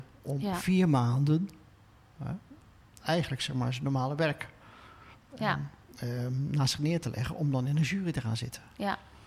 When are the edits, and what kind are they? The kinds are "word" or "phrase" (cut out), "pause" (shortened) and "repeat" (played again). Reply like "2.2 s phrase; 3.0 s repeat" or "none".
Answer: none